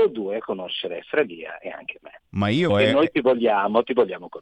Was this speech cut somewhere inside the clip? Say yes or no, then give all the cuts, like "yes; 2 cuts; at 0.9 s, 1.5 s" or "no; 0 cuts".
yes; 2 cuts; at 2.3 s, 2.7 s